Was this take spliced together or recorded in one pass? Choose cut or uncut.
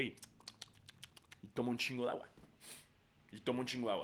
uncut